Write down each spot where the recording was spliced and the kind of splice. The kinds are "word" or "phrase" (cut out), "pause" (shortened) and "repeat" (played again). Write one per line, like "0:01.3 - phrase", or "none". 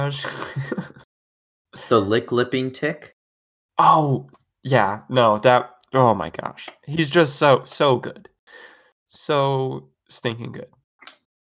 none